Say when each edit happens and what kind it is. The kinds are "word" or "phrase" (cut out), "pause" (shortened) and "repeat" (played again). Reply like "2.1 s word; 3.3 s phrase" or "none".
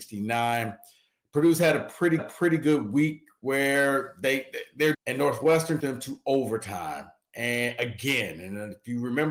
2.2 s repeat; 4.9 s phrase; 5.8 s word